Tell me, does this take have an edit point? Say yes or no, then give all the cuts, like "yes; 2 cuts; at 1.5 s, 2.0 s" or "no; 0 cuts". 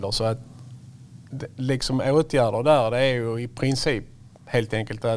no; 0 cuts